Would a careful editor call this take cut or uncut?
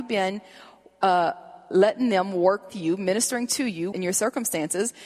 cut